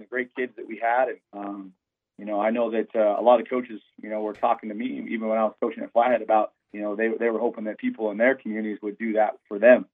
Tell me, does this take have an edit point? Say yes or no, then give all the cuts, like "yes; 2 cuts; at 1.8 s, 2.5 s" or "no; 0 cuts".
yes; 2 cuts; at 1.2 s, 6.6 s